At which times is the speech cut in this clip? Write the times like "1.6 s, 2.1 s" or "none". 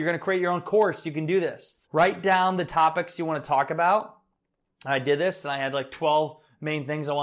1.8 s